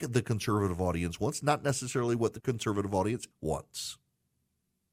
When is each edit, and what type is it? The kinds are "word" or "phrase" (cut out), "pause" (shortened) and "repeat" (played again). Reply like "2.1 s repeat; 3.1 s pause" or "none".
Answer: 2.4 s word; 3.3 s word